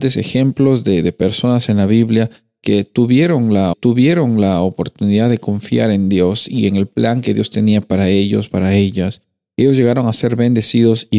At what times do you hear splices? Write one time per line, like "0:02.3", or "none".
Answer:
0:03.7